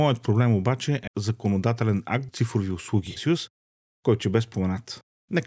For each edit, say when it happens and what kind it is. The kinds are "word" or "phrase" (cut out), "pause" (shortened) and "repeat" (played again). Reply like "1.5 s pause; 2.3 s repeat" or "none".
1.1 s word; 2.3 s word; 3.2 s phrase; 4.2 s word